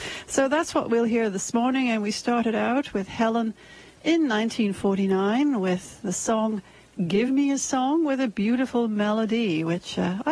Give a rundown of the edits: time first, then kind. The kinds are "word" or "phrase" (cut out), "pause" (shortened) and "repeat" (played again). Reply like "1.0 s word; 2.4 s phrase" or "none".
none